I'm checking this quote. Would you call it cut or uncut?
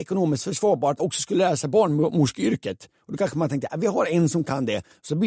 cut